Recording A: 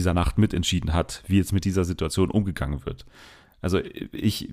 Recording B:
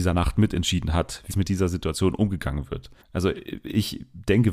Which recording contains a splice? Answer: B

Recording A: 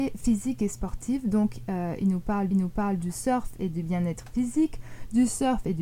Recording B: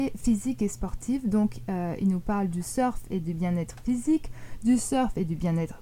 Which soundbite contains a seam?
A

